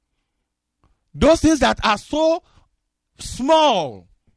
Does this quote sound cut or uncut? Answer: uncut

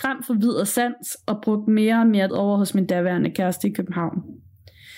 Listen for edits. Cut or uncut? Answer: cut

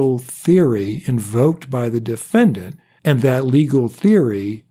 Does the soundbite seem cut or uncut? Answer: uncut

